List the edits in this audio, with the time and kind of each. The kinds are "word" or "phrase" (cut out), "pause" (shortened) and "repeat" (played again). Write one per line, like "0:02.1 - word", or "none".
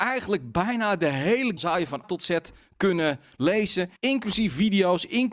0:01.6 - phrase
0:02.0 - word
0:04.0 - pause